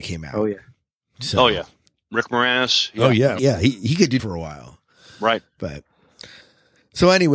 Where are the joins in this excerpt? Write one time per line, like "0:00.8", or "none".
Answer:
0:03.4
0:04.2